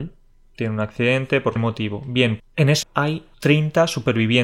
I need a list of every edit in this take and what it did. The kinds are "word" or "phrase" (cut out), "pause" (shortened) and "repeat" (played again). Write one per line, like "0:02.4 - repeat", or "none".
0:01.6 - word
0:02.4 - word
0:02.8 - word
0:03.3 - pause